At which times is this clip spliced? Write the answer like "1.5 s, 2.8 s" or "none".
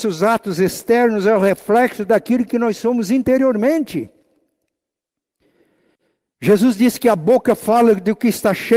none